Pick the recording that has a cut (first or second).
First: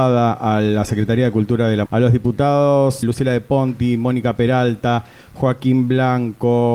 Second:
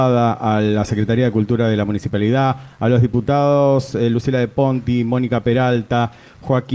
first